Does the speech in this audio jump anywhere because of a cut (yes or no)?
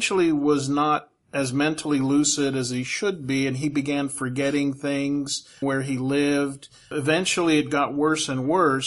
yes